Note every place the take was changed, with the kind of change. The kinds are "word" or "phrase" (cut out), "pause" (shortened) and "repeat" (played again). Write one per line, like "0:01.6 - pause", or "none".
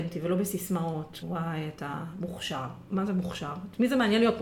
0:01.2 - word